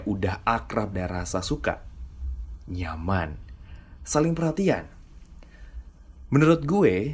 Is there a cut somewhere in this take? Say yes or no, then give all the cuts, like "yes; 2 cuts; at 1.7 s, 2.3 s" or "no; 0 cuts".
yes; 1 cut; at 0.9 s